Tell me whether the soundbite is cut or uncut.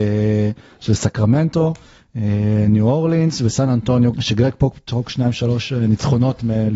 cut